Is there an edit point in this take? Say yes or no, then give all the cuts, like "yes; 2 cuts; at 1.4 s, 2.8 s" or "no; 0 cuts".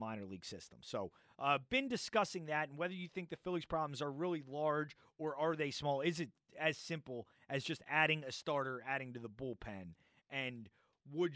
no; 0 cuts